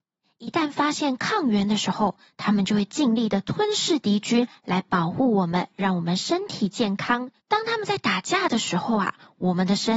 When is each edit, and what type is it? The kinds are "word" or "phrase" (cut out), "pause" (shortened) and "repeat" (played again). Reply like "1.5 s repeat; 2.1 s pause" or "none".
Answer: 7.4 s pause